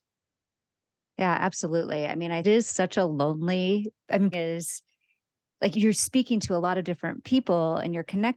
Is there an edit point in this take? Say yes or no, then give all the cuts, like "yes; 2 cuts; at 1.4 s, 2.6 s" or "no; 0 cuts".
yes; 4 cuts; at 2.4 s, 4.0 s, 4.3 s, 5.7 s